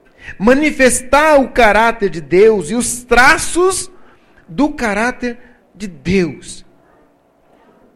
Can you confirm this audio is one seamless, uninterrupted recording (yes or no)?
yes